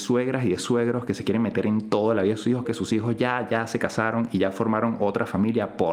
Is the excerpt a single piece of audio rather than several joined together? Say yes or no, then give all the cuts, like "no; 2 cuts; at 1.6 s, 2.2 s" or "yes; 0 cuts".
no; 1 cut; at 2.6 s